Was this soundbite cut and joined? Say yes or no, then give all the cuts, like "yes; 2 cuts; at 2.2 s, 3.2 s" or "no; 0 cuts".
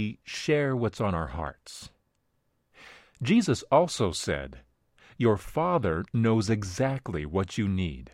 no; 0 cuts